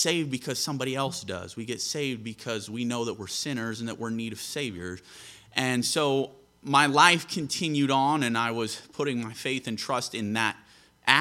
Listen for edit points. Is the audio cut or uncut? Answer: uncut